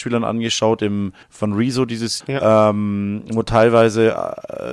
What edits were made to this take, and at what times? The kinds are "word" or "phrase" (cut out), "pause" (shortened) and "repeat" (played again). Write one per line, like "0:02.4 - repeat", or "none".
0:01.2 - pause
0:02.2 - word